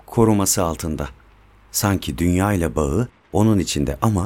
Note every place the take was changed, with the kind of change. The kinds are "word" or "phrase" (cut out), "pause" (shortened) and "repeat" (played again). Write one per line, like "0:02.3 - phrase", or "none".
none